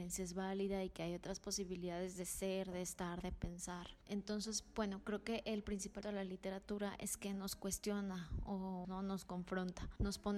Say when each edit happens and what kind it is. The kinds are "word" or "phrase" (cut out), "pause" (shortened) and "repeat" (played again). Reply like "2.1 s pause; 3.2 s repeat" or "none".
6.0 s word; 8.8 s phrase